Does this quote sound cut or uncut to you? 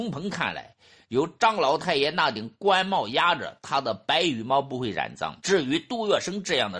cut